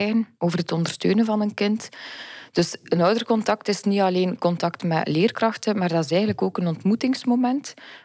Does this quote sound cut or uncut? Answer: uncut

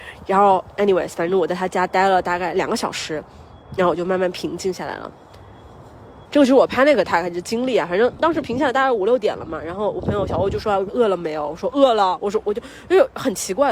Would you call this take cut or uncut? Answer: cut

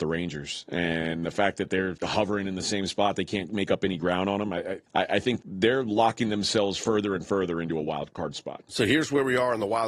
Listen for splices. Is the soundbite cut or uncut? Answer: cut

